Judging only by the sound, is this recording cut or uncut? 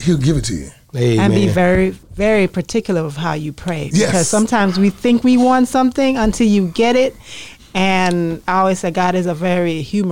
cut